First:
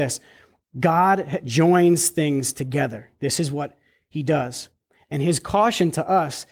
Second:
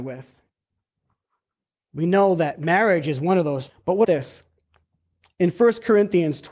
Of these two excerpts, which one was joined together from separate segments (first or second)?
second